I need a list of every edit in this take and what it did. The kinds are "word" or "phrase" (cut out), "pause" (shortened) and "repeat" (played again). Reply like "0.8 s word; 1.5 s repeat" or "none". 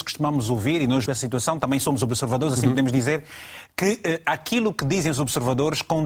1.1 s phrase